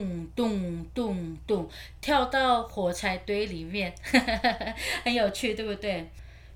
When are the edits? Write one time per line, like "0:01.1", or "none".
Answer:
none